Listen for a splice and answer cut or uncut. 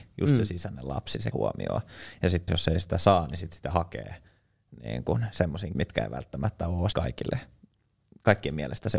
cut